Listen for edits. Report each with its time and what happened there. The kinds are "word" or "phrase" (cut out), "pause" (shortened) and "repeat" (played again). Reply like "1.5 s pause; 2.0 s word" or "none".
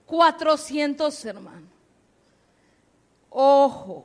1.2 s word